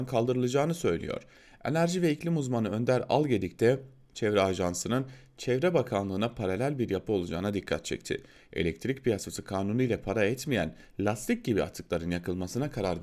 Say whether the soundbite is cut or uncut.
uncut